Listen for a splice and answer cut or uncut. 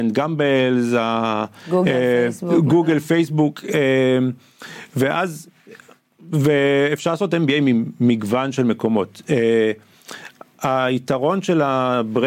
uncut